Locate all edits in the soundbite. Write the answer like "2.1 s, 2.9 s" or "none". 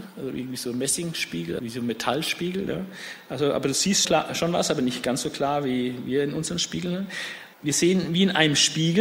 1.6 s, 4.0 s, 7.5 s